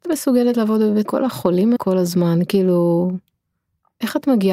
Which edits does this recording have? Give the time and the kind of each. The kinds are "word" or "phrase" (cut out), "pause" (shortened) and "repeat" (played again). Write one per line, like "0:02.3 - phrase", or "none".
0:01.0 - word
0:01.8 - word